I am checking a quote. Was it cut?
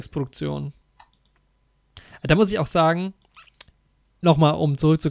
no; 0 cuts

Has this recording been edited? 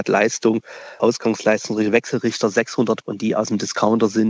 yes; 2 cuts; at 1.0 s, 3.0 s

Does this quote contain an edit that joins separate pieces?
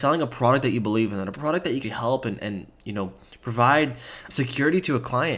yes; 3 cuts; at 1.8 s, 2.4 s, 4.3 s

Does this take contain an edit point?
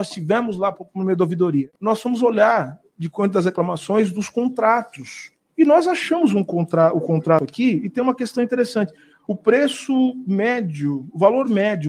no; 0 cuts

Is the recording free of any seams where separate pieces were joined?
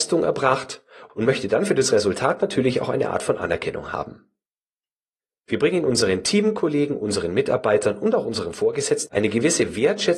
yes; 0 cuts

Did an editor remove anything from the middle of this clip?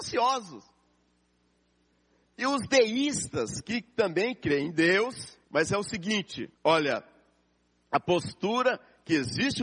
yes; 2 cuts; at 5.4 s, 6.5 s

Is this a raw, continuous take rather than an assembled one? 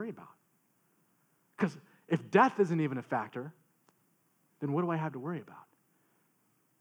yes; 0 cuts

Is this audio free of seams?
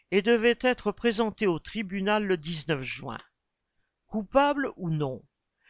yes; 0 cuts

